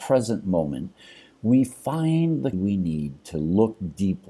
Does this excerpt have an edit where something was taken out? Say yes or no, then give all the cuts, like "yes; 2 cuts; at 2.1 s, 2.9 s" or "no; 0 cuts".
yes; 1 cut; at 2.5 s